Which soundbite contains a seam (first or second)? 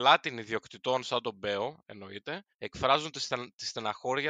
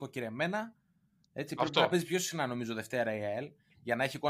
first